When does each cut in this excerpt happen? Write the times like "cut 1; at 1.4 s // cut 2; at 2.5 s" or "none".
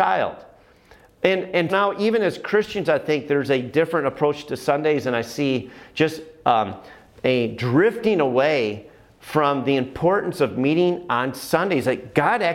cut 1; at 1.7 s